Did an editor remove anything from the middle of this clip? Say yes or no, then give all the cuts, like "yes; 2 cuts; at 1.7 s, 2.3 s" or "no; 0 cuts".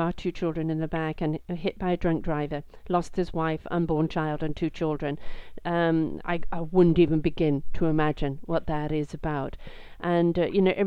no; 0 cuts